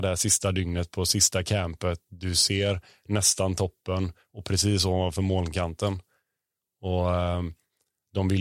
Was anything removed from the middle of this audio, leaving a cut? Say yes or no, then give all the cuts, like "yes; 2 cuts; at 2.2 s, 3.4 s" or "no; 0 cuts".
no; 0 cuts